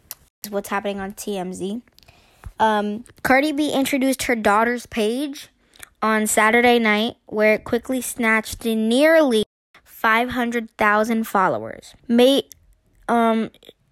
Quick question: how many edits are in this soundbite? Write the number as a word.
two